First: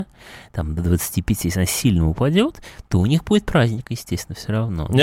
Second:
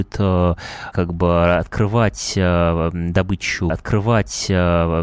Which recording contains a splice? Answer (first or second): second